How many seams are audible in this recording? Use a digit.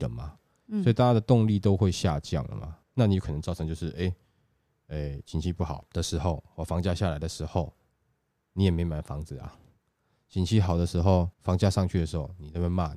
2